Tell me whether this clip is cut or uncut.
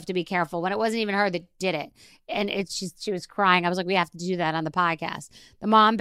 uncut